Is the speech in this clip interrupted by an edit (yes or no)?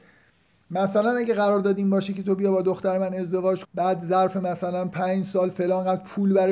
yes